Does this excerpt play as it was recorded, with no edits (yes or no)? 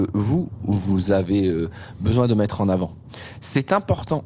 yes